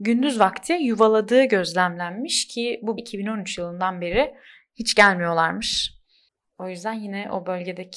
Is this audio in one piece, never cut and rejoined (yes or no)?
no